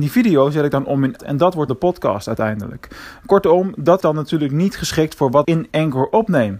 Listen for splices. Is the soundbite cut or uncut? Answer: cut